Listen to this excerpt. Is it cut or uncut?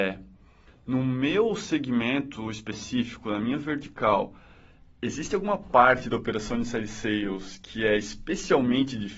uncut